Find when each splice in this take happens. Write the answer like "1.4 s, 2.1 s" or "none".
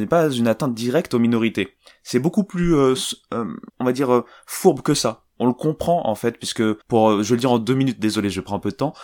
3.7 s, 6.8 s